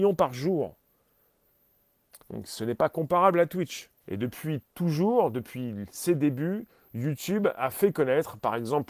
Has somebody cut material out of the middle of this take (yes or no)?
yes